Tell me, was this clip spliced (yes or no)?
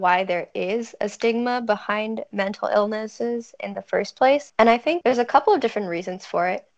no